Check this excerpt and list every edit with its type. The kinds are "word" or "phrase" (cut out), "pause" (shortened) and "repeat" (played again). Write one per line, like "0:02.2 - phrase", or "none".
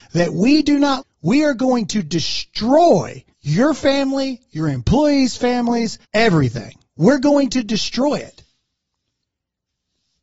0:01.0 - word
0:03.3 - pause
0:06.0 - pause